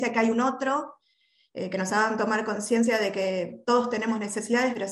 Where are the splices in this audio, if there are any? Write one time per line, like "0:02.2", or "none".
none